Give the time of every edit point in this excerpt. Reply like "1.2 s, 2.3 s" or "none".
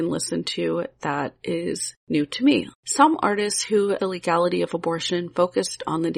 2.7 s, 4.0 s